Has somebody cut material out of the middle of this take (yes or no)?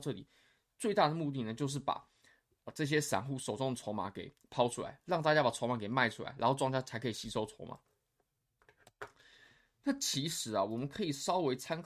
no